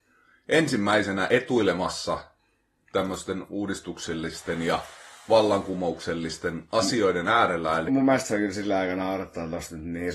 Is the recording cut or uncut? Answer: cut